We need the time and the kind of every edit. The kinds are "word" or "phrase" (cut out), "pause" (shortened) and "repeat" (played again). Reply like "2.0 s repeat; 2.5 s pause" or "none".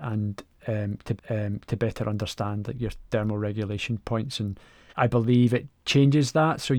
1.2 s repeat; 4.9 s word